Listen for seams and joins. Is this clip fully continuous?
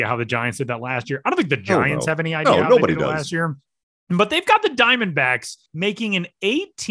no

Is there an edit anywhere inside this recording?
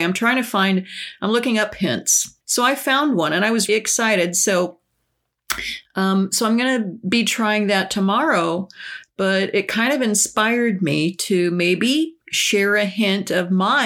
yes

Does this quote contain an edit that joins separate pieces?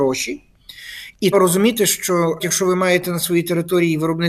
yes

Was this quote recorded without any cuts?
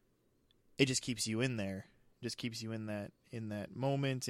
yes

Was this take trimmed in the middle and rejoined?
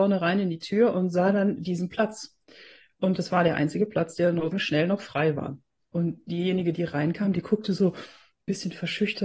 yes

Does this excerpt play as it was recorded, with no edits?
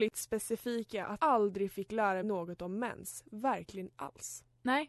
no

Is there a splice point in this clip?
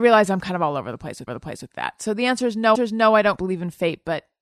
yes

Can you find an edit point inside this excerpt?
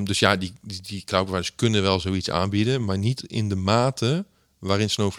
no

